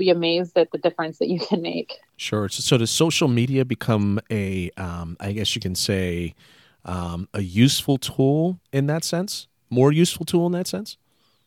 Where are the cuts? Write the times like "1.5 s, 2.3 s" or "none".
none